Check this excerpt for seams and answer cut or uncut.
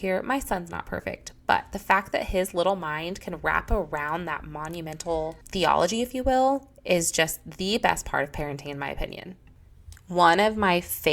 cut